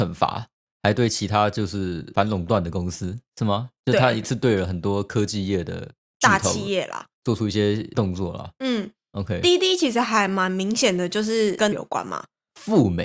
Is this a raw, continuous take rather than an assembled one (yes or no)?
no